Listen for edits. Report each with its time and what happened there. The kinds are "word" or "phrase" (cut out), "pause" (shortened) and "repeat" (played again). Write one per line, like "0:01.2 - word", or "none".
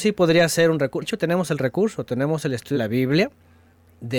0:01.0 - word
0:02.7 - word